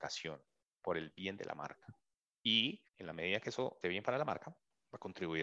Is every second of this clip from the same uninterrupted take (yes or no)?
no